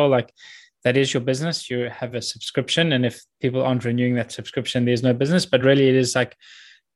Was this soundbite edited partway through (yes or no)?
no